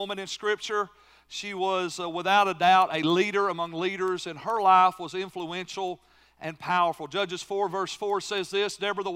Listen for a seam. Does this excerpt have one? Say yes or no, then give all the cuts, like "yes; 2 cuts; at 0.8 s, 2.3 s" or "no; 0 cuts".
no; 0 cuts